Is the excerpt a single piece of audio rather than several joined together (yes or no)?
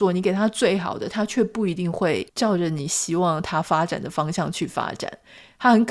no